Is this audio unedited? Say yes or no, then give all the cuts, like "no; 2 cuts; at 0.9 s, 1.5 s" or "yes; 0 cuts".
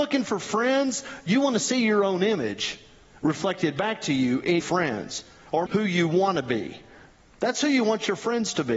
no; 2 cuts; at 4.6 s, 5.7 s